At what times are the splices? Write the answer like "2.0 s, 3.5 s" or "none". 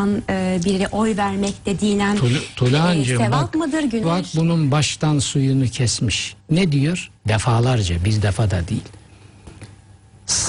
4.0 s, 6.4 s, 7.2 s